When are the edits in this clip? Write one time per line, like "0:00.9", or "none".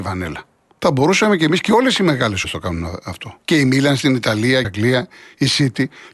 0:02.4
0:03.4
0:04.6